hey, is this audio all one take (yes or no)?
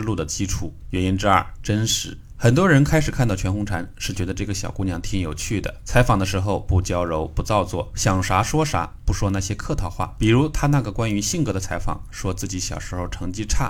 yes